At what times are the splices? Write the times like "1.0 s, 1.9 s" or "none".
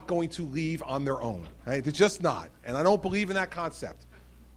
1.6 s